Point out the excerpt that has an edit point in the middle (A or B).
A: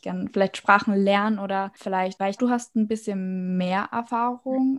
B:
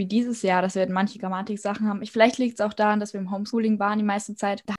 A